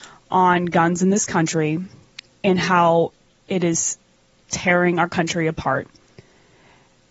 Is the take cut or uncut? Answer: uncut